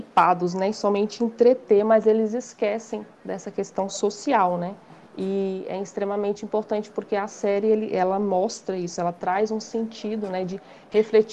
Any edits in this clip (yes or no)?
no